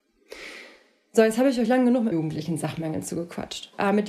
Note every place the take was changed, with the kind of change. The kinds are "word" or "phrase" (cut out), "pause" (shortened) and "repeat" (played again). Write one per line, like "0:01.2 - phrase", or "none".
0:02.1 - word

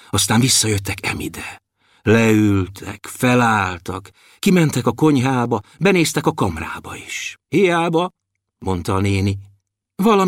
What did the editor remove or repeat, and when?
0:07.4 - pause

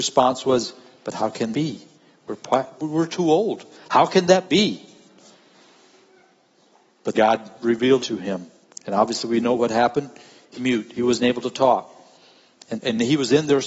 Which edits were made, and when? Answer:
0:01.5 - word
0:02.7 - word
0:07.1 - word
0:08.0 - word
0:10.6 - word
0:12.7 - word

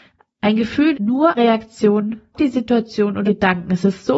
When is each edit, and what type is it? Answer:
0:00.9 - word
0:01.4 - word
0:02.3 - word
0:03.2 - word

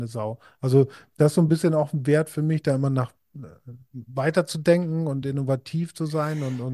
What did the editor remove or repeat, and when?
none

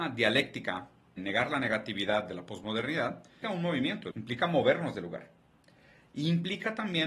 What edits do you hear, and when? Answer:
0:01.2 - word
0:03.4 - word
0:04.1 - word

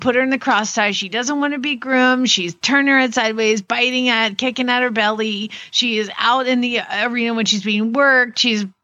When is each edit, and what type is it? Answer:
none

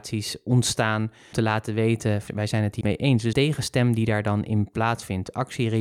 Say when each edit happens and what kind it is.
0:01.3 - word
0:02.3 - word
0:02.8 - word
0:03.3 - word

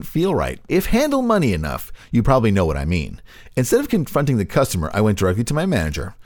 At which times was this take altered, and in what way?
none

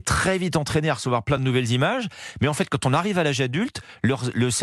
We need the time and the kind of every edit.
none

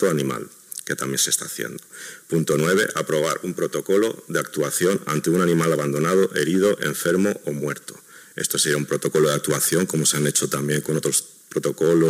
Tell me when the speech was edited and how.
none

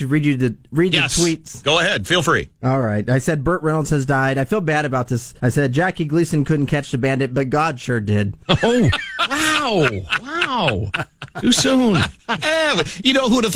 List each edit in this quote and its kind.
0:05.4 - pause
0:08.4 - pause

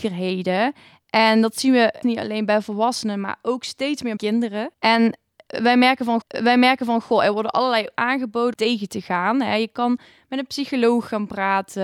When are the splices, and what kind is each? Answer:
0:02.0 - word
0:04.2 - word
0:04.7 - pause
0:06.2 - repeat
0:08.0 - word
0:08.5 - phrase

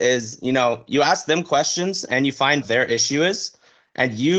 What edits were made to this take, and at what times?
0:02.6 - phrase

